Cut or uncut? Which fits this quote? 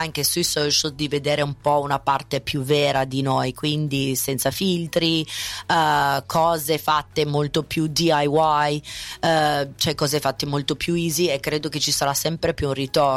uncut